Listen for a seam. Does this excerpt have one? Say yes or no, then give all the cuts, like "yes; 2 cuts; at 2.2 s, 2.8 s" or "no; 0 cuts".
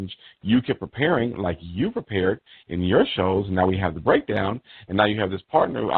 no; 0 cuts